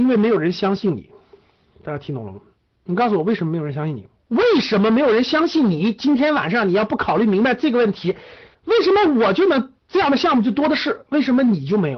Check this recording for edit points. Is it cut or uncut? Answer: cut